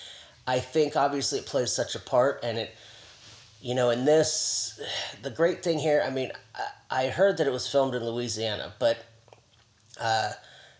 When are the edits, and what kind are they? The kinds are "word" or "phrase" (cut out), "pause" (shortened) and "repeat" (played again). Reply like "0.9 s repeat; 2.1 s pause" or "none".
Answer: none